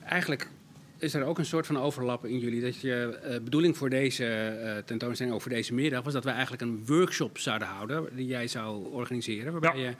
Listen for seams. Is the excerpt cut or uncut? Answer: uncut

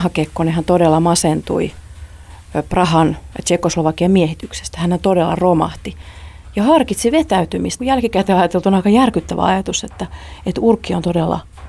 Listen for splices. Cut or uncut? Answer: cut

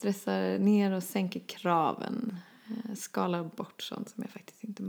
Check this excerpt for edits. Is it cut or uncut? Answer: uncut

